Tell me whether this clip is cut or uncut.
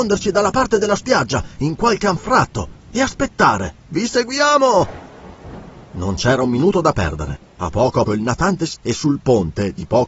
cut